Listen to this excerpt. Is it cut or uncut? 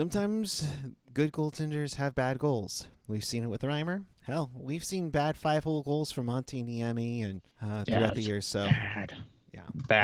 cut